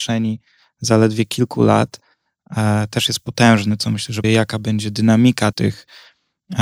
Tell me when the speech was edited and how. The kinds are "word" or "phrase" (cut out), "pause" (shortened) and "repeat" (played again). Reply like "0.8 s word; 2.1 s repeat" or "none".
4.2 s word; 5.5 s word